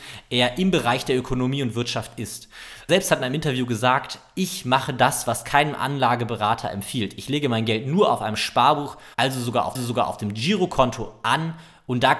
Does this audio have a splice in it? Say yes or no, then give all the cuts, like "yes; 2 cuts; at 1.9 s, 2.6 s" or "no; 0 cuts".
yes; 3 cuts; at 2.9 s, 9.1 s, 9.7 s